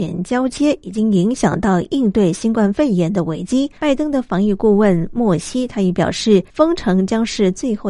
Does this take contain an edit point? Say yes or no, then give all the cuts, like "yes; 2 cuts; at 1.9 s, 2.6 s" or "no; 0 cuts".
yes; 2 cuts; at 3.8 s, 6.5 s